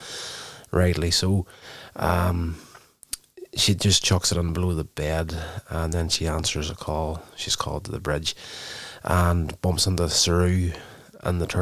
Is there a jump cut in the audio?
no; 0 cuts

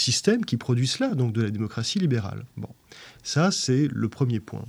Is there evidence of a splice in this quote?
no; 0 cuts

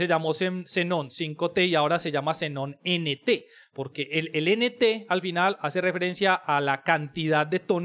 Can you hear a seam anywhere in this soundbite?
no; 0 cuts

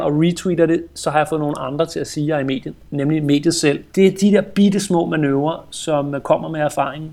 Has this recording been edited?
yes; 1 cut; at 3.9 s

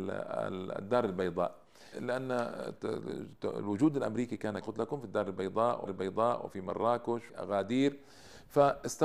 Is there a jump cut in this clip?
yes; 4 cuts; at 1.9 s, 4.6 s, 5.9 s, 7.3 s

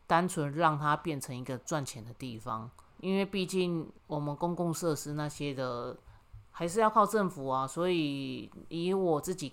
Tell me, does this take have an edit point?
yes; 2 cuts; at 2.9 s, 4.0 s

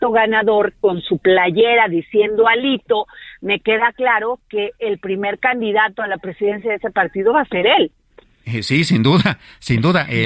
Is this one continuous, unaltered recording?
yes; 0 cuts

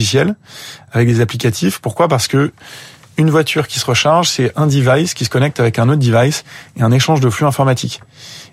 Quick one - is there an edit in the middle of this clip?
no; 0 cuts

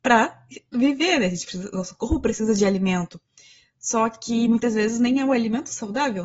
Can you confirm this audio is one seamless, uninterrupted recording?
yes; 0 cuts

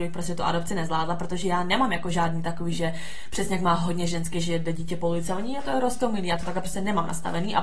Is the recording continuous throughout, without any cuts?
yes; 0 cuts

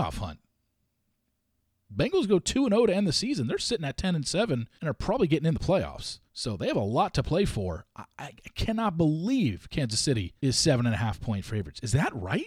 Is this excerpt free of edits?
no; 3 cuts; at 4.8 s, 6.3 s, 10.4 s

